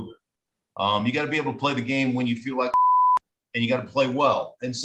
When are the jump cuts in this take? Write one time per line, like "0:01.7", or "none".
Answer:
none